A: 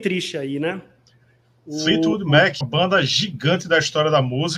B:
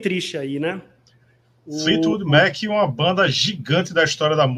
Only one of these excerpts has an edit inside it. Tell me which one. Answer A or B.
A